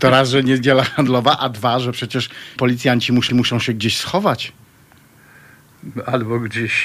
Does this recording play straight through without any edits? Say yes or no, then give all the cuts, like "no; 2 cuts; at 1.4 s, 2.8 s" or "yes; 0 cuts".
no; 2 cuts; at 2.6 s, 3.3 s